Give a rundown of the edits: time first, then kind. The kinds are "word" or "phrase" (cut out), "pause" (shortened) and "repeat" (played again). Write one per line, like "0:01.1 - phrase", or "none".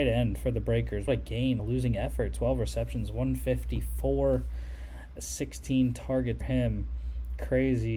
0:01.1 - word
0:01.6 - word
0:05.2 - word
0:06.4 - word